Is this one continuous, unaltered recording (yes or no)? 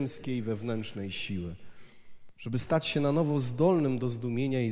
yes